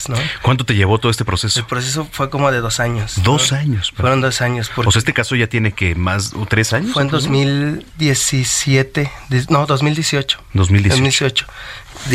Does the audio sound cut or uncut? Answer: uncut